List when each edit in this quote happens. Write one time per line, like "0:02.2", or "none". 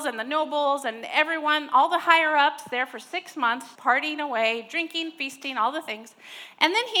0:03.8